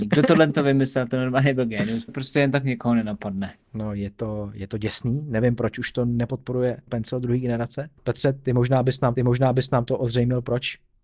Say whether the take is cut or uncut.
cut